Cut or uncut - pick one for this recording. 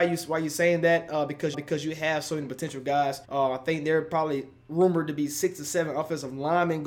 cut